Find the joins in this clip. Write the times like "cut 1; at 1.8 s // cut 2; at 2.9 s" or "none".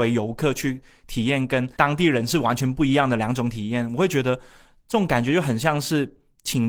cut 1; at 1.7 s